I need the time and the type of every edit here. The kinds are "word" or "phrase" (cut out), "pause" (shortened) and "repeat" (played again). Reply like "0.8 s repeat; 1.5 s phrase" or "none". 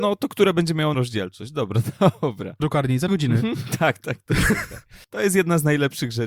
0.9 s word; 2.6 s phrase; 3.1 s word; 5.0 s pause